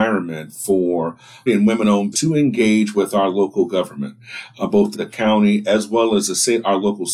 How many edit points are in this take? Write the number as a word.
three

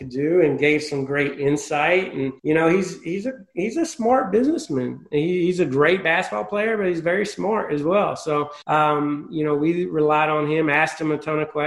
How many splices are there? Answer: two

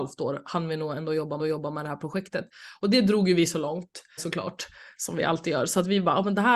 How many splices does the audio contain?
two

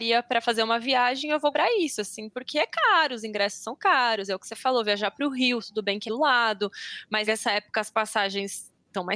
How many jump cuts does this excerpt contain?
three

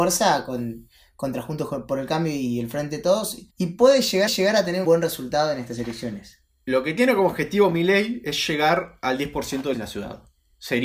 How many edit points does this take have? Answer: four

